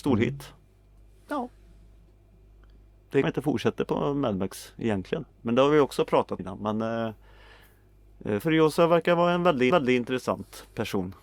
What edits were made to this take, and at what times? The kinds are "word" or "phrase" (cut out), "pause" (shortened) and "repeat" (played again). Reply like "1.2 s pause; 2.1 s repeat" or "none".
3.2 s phrase; 5.3 s pause; 6.4 s word; 8.4 s word; 9.7 s repeat